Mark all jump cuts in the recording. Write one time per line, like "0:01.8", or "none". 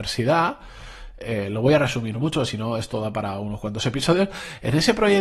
none

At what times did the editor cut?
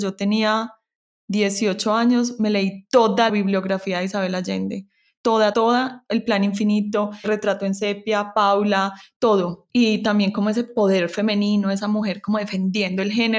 0:03.3
0:05.5
0:07.2
0:09.7

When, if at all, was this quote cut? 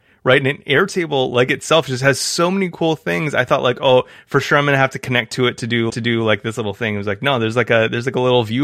0:05.9

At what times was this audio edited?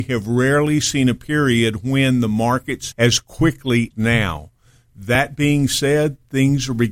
0:02.9
0:03.9

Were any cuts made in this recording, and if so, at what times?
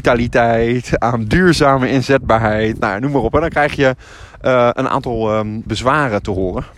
0:05.7

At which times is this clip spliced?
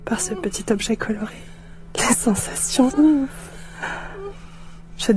0:02.9

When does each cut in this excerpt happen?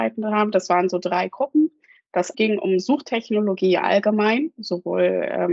0:02.3

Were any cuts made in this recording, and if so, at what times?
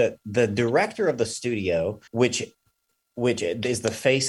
0:02.1

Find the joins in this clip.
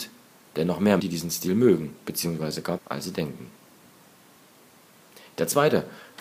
0:01.0
0:02.8

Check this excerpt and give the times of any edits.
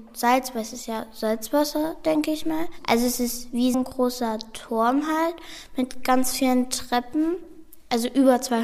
0:03.7

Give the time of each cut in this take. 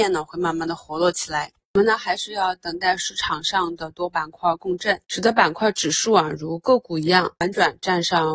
0:05.0
0:07.4

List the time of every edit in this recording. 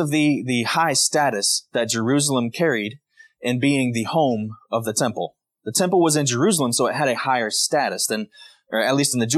none

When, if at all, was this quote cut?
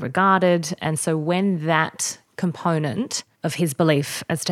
0:03.3

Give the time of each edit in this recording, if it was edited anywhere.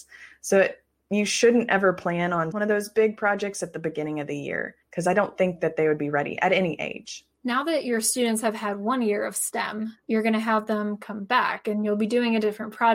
0:02.5
0:04.8

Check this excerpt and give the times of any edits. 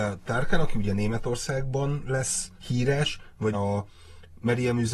0:02.6
0:03.5

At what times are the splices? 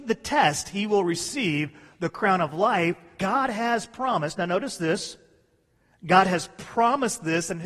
0:03.2

